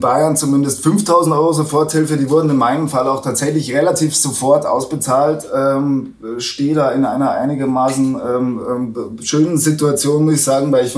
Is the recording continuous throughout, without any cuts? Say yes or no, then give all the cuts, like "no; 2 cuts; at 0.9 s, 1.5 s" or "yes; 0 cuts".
yes; 0 cuts